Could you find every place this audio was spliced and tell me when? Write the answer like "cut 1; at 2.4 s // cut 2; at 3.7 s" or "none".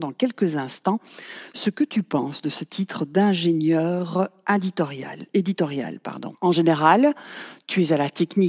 cut 1; at 6.3 s